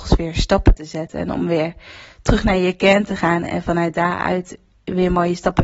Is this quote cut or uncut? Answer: uncut